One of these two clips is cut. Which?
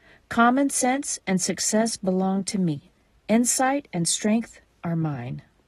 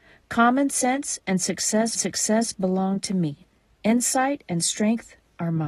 second; 1 cut; at 2.0 s

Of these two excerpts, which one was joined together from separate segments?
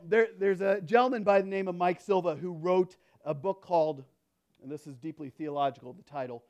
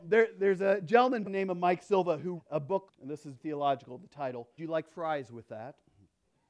second; 5 cuts; at 1.2 s, 2.4 s, 2.9 s, 3.4 s, 4.6 s

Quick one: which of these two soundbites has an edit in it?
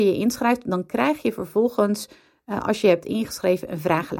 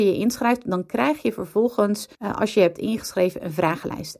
second; 1 cut; at 2.1 s

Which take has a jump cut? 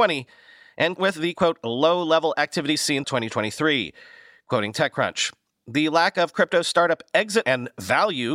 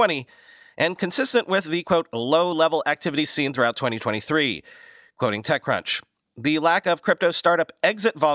first; 3 cuts; at 1.0 s, 3.0 s, 7.4 s

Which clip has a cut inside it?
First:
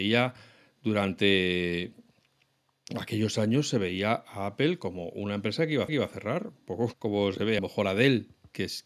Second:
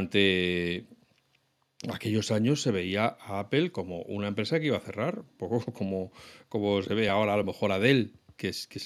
first; 3 cuts; at 5.9 s, 6.9 s, 7.6 s

